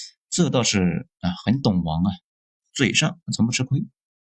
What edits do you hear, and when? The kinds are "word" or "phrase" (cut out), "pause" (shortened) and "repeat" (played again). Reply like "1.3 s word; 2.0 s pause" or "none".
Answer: none